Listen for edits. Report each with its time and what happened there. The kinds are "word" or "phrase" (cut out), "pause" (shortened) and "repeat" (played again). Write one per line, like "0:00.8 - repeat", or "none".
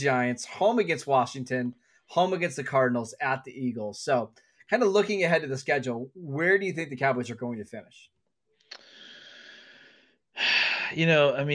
none